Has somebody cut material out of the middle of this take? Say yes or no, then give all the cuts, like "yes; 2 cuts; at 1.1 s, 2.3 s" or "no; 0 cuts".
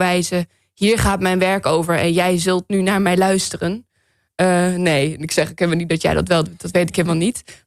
no; 0 cuts